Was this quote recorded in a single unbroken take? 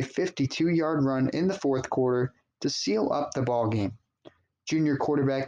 yes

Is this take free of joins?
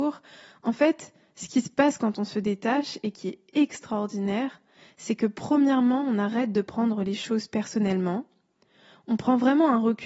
yes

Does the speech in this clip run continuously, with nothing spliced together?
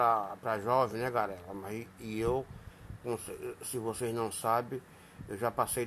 yes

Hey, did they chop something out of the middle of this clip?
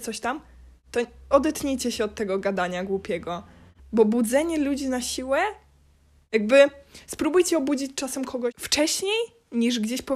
yes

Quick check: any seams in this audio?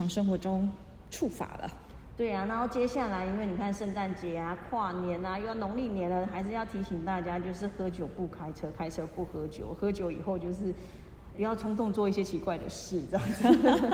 yes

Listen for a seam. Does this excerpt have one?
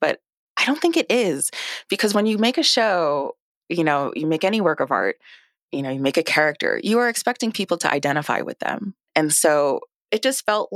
no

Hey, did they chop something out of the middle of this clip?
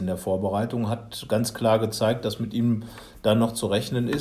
no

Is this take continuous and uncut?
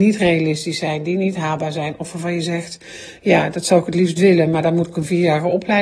yes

